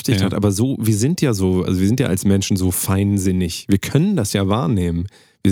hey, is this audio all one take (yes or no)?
yes